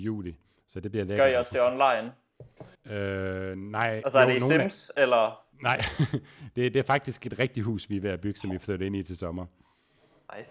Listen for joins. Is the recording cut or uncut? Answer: cut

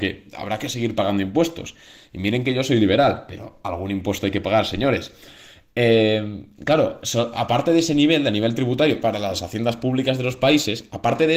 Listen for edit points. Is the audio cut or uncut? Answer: uncut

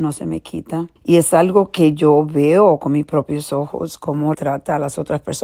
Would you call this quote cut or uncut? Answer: cut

